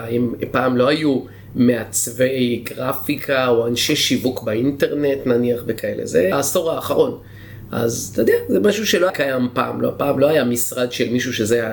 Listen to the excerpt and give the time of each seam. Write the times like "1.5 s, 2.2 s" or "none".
6.3 s, 9.1 s